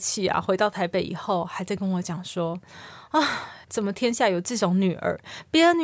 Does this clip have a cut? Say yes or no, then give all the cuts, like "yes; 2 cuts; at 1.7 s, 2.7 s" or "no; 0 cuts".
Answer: yes; 1 cut; at 3.6 s